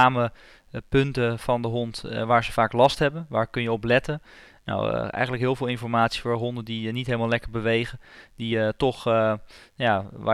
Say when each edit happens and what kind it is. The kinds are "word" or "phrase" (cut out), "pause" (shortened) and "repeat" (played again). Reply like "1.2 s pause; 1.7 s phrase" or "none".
none